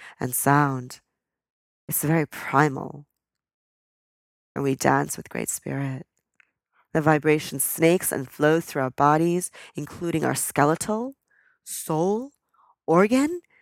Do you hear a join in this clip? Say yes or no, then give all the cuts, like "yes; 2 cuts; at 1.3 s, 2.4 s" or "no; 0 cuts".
no; 0 cuts